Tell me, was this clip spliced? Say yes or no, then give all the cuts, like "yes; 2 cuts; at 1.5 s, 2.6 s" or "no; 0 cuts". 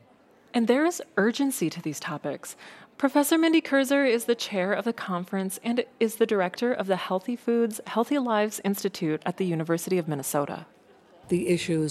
no; 0 cuts